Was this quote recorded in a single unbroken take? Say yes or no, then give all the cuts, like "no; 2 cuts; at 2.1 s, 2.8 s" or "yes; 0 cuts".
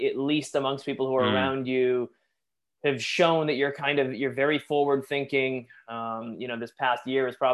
yes; 0 cuts